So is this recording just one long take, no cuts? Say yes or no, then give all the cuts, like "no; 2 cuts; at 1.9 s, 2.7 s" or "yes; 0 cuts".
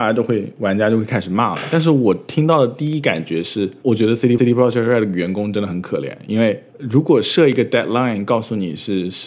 no; 1 cut; at 4.4 s